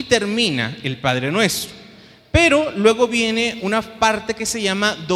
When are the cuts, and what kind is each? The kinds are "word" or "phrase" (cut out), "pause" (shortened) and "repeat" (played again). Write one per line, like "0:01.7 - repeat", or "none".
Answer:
none